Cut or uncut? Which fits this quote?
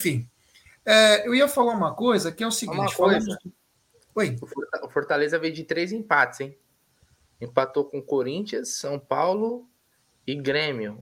uncut